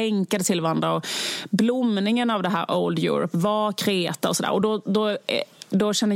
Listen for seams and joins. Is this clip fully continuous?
yes; 0 cuts

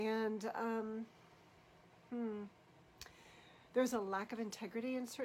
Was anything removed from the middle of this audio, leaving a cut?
no; 0 cuts

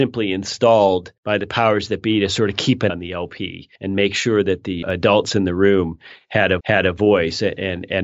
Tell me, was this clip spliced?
yes; 5 cuts; at 1.2 s, 2.9 s, 3.8 s, 4.8 s, 6.6 s

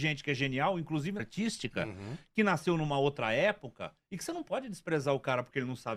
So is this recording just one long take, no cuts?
no; 1 cut; at 1.2 s

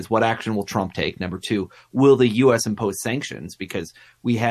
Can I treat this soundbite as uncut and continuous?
yes; 0 cuts

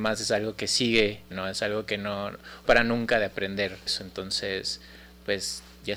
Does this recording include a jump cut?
yes; 3 cuts; at 1.3 s, 2.7 s, 3.9 s

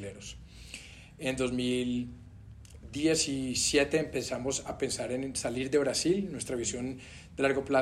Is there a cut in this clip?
no; 0 cuts

